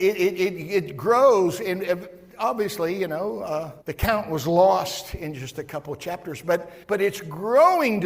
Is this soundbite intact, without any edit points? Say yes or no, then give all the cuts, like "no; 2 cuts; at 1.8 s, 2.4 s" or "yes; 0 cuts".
no; 2 cuts; at 3.8 s, 6.8 s